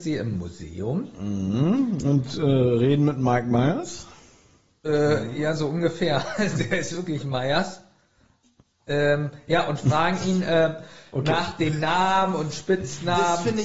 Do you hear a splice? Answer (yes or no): no